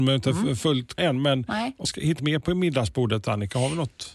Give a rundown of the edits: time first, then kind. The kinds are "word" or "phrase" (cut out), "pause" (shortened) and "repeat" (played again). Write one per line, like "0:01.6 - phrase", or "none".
0:01.0 - word
0:01.8 - word
0:02.2 - word